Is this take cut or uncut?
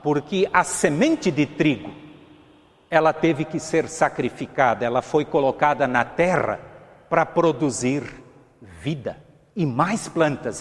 uncut